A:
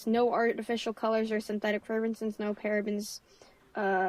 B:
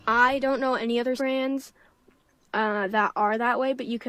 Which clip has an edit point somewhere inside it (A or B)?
B